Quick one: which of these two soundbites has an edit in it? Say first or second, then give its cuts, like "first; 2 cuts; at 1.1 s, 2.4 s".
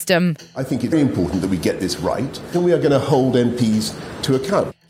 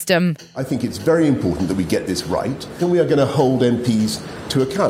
first; 1 cut; at 0.9 s